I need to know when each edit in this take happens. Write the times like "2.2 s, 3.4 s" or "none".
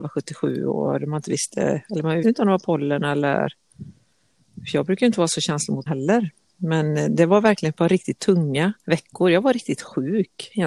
2.2 s, 5.9 s, 8.8 s